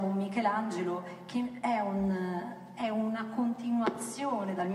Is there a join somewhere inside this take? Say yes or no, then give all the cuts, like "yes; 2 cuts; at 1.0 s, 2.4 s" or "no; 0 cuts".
no; 0 cuts